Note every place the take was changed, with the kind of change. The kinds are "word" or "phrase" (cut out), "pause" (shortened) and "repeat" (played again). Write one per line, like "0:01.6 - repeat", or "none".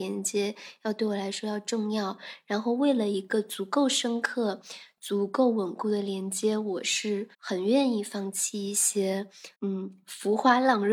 0:07.3 - pause
0:09.5 - pause

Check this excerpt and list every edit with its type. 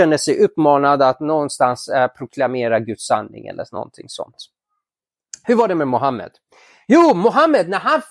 none

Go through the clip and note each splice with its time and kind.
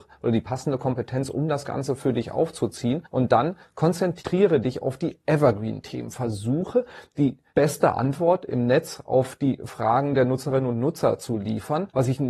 none

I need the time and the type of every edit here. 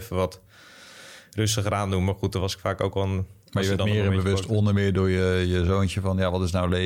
0:03.4 - pause

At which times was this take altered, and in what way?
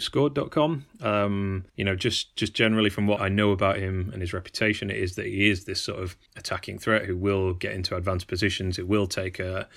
0:01.7 - pause
0:03.2 - word
0:06.3 - pause

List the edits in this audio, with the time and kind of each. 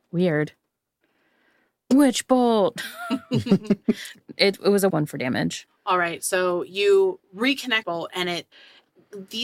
0:04.9 - phrase
0:07.8 - phrase

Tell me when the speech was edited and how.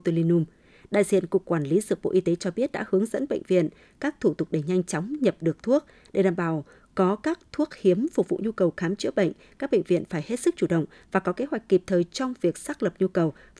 none

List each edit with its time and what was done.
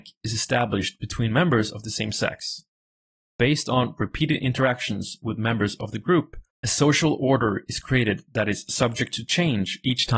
0:06.5 - pause

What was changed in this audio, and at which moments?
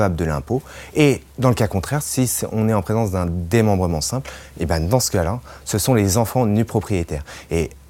none

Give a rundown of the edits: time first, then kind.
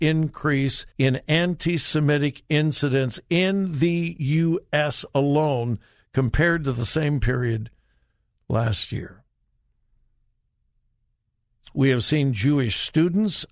0:00.9 - pause

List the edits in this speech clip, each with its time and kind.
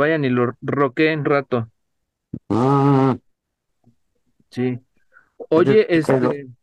0:01.2 - word
0:02.4 - pause

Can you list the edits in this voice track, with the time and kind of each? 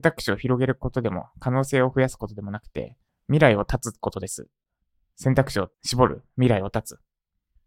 0:03.1 - pause
0:05.7 - pause

